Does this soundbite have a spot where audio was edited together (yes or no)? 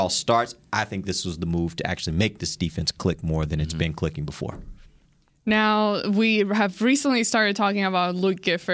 no